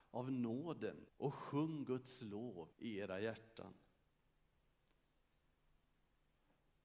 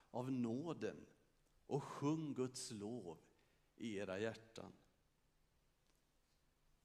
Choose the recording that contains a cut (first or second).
first